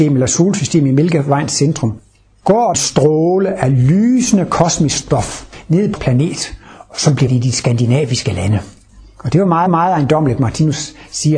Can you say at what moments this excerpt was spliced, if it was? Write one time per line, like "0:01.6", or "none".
0:02.7
0:06.0
0:07.3
0:08.9
0:09.7